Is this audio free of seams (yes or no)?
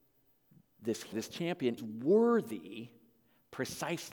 no